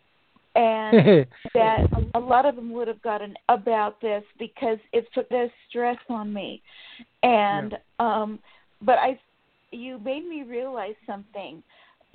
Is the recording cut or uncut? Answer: cut